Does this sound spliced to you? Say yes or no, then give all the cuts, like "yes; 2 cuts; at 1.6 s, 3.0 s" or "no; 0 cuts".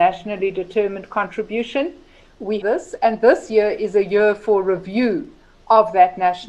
yes; 1 cut; at 2.6 s